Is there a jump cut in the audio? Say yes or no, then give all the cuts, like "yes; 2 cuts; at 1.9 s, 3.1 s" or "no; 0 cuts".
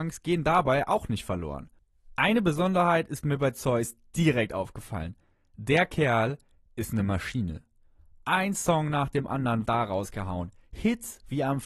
yes; 1 cut; at 9.7 s